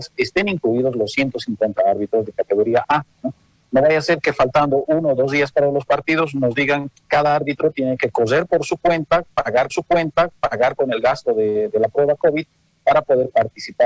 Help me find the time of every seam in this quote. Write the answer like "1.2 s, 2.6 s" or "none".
9.7 s